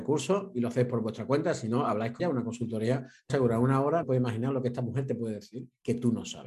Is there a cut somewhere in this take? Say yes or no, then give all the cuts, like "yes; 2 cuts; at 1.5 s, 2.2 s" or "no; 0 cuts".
yes; 3 cuts; at 2.2 s, 3.3 s, 4.0 s